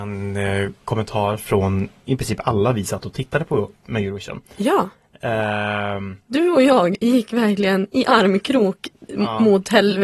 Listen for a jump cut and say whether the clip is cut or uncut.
uncut